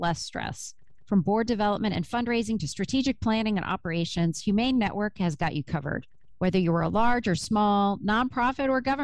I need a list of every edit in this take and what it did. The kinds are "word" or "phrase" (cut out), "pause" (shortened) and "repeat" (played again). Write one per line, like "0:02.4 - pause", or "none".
none